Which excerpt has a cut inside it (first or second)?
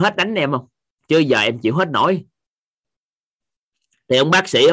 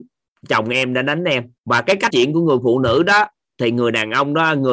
second